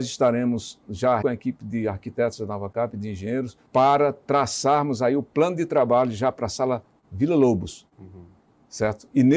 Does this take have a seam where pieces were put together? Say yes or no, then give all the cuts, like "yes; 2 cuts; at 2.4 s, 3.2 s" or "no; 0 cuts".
yes; 2 cuts; at 1.2 s, 3.7 s